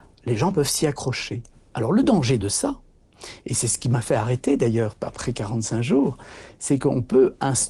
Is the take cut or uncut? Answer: uncut